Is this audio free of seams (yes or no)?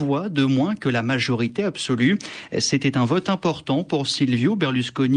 yes